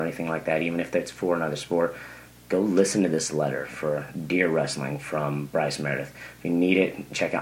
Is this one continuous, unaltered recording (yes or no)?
yes